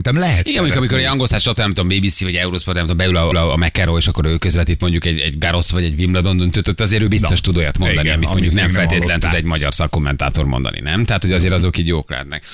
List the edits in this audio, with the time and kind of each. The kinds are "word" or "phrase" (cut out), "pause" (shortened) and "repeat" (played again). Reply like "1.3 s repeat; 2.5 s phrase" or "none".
3.3 s repeat